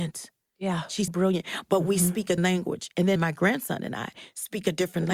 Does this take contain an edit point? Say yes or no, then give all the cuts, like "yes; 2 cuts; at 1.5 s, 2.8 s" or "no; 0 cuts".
yes; 3 cuts; at 1.1 s, 2.4 s, 3.2 s